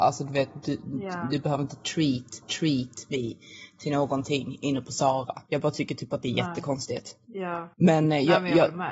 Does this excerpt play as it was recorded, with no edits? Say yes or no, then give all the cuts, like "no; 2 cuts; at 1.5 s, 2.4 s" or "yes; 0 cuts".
no; 3 cuts; at 2.4 s, 5.5 s, 7.7 s